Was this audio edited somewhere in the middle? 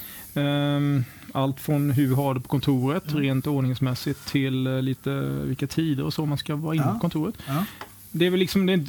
no; 0 cuts

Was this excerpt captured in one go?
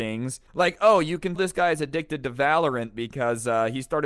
no; 1 cut; at 1.4 s

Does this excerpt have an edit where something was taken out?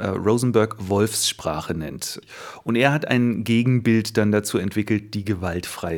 no; 0 cuts

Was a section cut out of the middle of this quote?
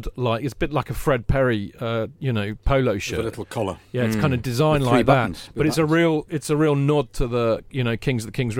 no; 0 cuts

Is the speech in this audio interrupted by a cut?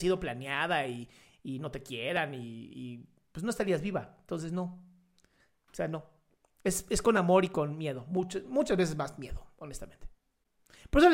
no; 0 cuts

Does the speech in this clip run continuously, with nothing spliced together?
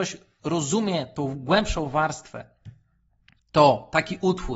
yes; 0 cuts

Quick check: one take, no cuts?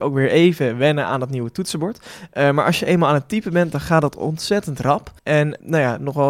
no; 1 cut; at 5.2 s

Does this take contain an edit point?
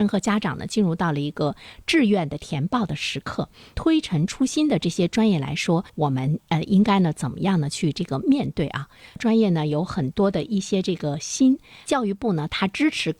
yes; 1 cut; at 5.9 s

